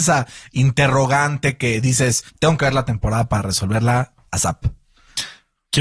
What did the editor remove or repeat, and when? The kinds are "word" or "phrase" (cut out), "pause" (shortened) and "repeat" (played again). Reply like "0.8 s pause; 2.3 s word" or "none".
2.3 s pause